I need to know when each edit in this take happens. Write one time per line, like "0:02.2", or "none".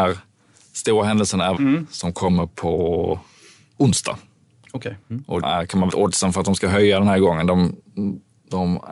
0:01.6
0:05.0
0:05.4
0:05.9